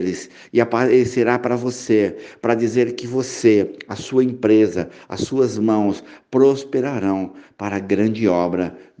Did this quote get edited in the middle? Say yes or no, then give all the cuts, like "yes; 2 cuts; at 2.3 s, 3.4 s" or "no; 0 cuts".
no; 0 cuts